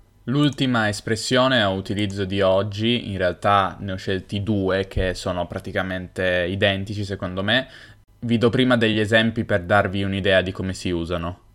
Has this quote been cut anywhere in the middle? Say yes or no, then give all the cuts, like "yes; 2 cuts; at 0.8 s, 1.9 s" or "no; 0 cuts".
no; 0 cuts